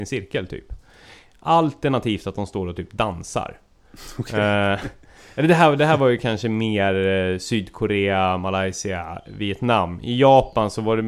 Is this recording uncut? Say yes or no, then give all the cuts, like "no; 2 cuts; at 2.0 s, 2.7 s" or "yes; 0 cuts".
yes; 0 cuts